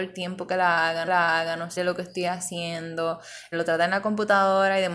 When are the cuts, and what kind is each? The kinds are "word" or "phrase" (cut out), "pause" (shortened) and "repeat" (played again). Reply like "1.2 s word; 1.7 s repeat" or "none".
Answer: 1.1 s repeat; 1.8 s word; 3.5 s word